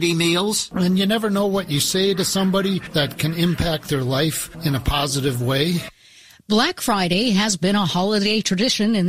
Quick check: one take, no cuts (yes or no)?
yes